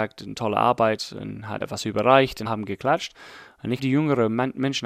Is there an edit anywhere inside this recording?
yes; 3 cuts; at 1.6 s, 2.5 s, 3.8 s

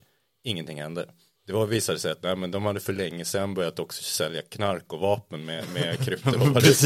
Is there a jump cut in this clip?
no; 0 cuts

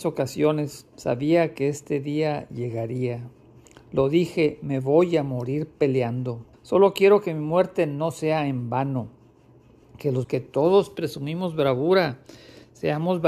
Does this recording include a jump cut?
yes; 2 cuts; at 6.5 s, 10.2 s

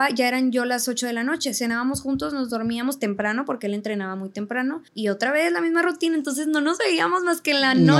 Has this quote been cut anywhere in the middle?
yes; 1 cut; at 4.9 s

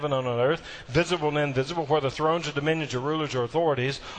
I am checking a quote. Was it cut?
no; 0 cuts

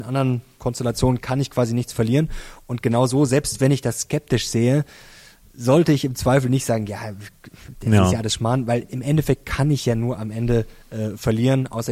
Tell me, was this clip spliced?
no; 0 cuts

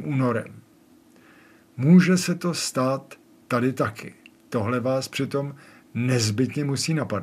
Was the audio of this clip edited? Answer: no; 0 cuts

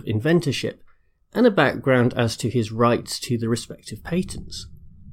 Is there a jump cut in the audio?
no; 0 cuts

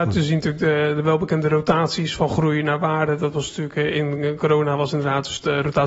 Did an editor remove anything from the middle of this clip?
no; 0 cuts

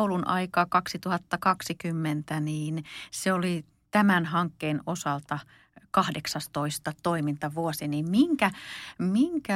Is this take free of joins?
yes; 0 cuts

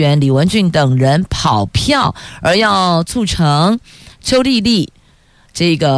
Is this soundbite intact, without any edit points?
yes; 0 cuts

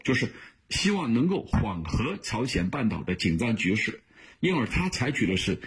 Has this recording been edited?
no; 0 cuts

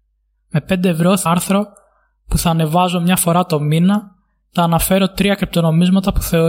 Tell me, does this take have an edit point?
yes; 2 cuts; at 1.3 s, 4.6 s

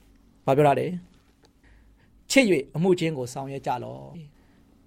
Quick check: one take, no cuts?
yes; 0 cuts

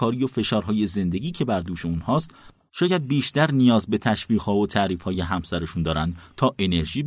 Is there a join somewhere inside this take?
no; 0 cuts

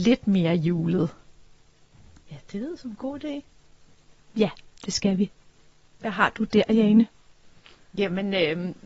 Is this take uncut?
yes; 0 cuts

